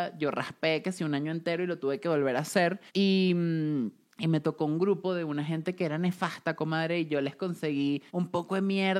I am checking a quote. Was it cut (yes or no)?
yes